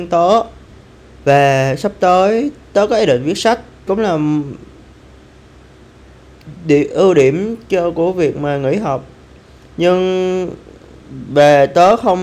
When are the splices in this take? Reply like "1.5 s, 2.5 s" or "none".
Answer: 3.9 s